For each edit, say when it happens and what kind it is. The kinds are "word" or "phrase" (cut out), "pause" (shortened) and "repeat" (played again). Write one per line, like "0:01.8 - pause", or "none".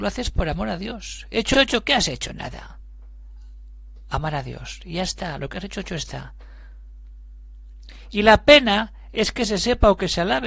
0:01.5 - word